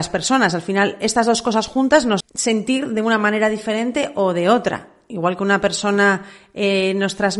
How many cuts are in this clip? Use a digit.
1